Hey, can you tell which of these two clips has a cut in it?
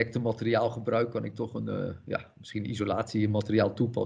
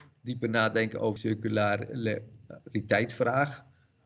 second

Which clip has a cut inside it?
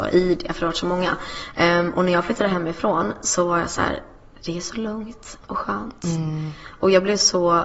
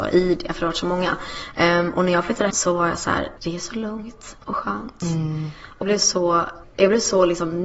second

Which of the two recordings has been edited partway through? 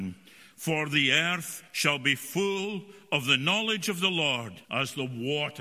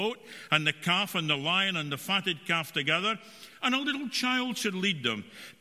first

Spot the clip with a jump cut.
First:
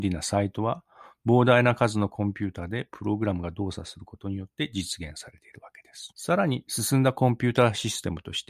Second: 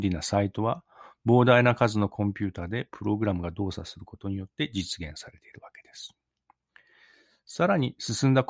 first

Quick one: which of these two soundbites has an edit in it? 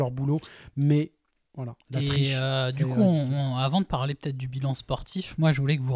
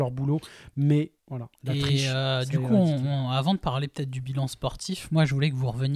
second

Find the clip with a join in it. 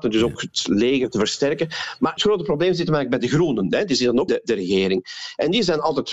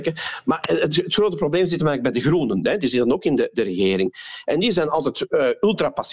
first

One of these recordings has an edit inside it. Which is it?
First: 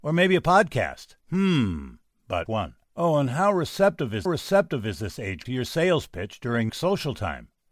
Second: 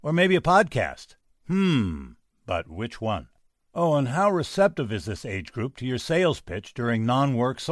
first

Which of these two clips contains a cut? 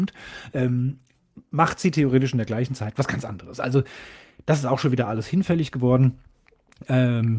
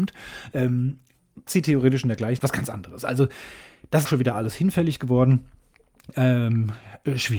second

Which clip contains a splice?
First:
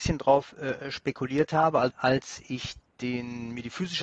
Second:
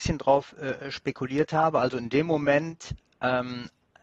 first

